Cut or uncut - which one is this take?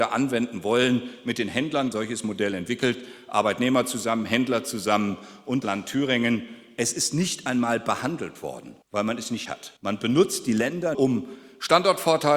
cut